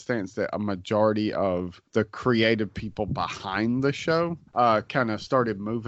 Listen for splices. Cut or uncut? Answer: cut